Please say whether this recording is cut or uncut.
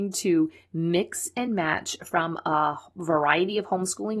uncut